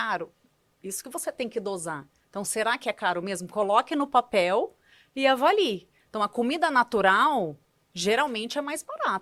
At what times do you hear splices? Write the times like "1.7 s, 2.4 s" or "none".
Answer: none